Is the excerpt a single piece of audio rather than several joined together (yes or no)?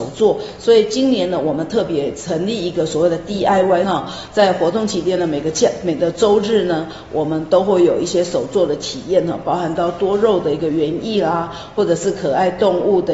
no